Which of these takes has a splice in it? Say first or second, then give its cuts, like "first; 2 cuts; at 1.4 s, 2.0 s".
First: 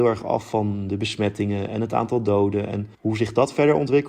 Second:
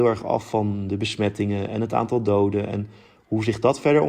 first; 1 cut; at 2.9 s